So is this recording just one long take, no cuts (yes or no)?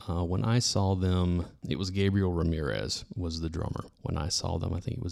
no